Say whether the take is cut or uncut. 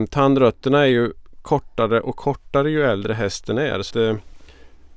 cut